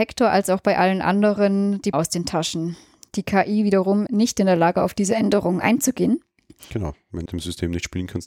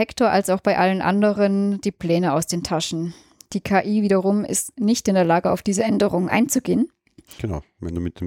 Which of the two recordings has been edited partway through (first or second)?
first